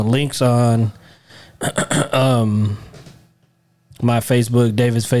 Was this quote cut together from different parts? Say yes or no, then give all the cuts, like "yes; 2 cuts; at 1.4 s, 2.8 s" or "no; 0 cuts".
no; 0 cuts